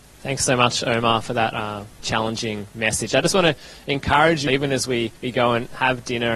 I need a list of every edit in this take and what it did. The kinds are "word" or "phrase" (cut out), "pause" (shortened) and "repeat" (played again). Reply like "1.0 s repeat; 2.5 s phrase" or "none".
2.0 s word; 4.5 s word; 5.2 s pause